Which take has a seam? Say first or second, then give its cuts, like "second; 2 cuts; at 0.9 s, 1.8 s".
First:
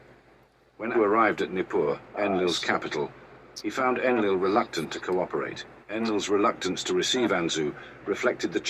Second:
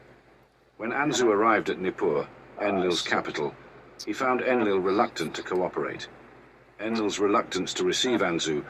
first; 3 cuts; at 0.9 s, 2.1 s, 5.8 s